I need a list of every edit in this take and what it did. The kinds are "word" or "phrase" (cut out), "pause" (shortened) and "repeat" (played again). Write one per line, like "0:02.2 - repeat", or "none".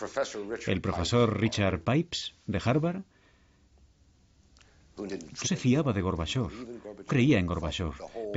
0:05.4 - word
0:07.1 - word